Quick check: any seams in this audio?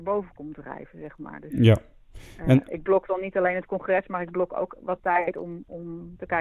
no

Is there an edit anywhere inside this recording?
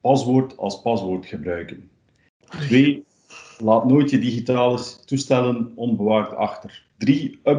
no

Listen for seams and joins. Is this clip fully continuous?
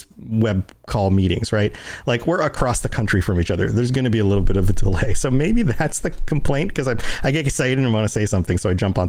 yes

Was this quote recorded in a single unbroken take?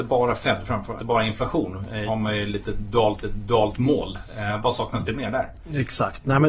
no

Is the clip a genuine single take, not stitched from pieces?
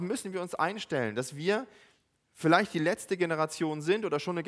yes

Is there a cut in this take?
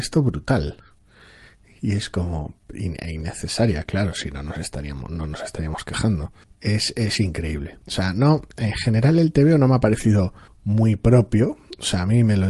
yes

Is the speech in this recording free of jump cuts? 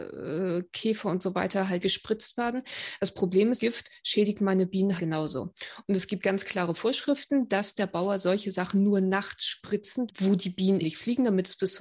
no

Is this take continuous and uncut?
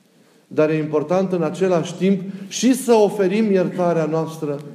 yes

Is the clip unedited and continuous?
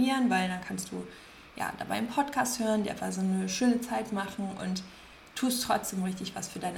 yes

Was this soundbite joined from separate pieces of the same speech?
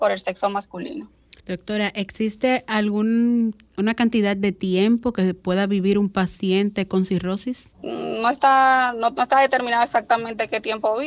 yes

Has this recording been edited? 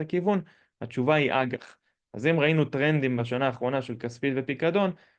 no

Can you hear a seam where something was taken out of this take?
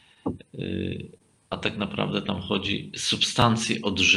no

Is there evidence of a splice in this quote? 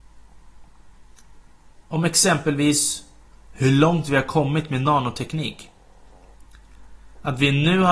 no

